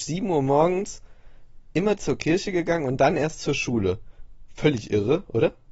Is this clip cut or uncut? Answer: uncut